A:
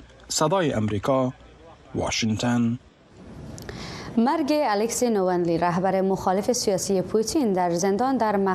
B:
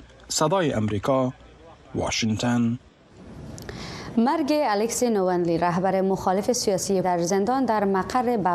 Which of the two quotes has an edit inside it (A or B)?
B